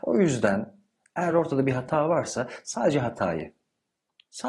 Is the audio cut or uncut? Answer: uncut